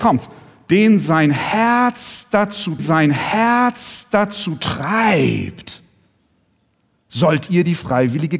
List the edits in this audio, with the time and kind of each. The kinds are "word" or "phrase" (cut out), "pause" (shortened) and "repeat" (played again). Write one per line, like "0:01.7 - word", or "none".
0:02.8 - repeat